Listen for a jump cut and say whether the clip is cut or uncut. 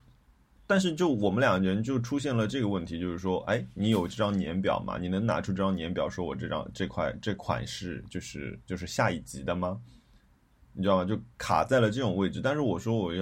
uncut